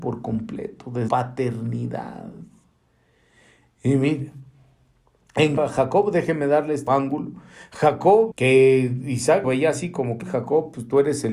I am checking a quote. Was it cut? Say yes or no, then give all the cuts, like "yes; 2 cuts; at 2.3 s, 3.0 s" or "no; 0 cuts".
yes; 6 cuts; at 1.1 s, 5.6 s, 6.9 s, 8.3 s, 9.4 s, 10.2 s